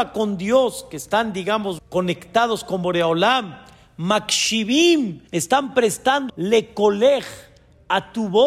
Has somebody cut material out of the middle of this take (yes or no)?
yes